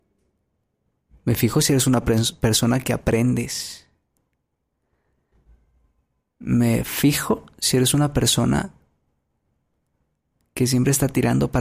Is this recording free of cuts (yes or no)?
yes